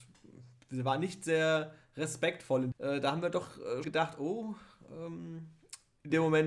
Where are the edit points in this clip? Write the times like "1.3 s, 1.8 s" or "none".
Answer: 2.7 s, 3.8 s

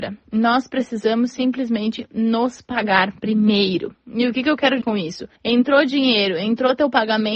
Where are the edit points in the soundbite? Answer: 4.8 s, 5.4 s

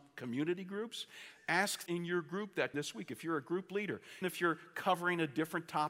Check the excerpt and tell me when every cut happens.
1.9 s, 2.7 s, 4.2 s

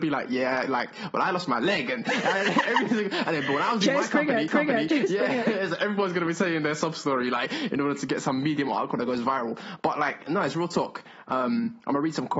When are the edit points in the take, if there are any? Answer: 4.5 s

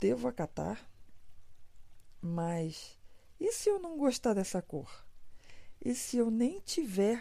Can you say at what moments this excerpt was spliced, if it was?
none

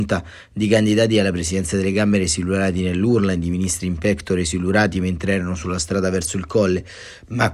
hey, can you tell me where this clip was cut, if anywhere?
none

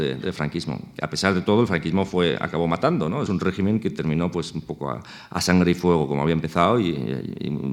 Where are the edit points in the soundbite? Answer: 3.3 s

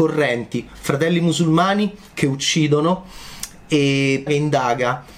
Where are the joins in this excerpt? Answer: 4.3 s

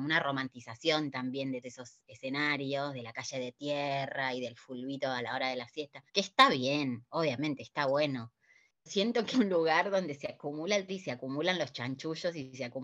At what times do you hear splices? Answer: 1.6 s, 6.1 s, 8.9 s, 9.3 s, 10.9 s

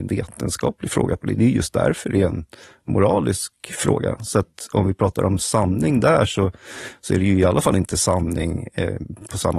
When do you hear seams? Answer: none

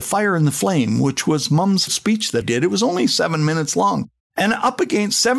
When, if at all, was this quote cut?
1.9 s, 2.4 s, 4.2 s

